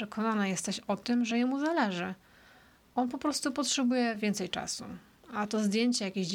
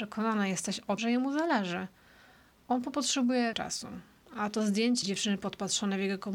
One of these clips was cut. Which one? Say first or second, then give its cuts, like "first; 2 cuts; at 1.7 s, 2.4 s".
second; 4 cuts; at 1.0 s, 2.9 s, 3.5 s, 5.0 s